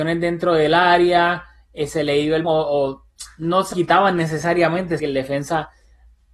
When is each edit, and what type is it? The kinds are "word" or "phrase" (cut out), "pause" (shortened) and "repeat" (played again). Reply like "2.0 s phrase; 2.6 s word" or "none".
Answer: 2.4 s word; 3.7 s word; 5.0 s word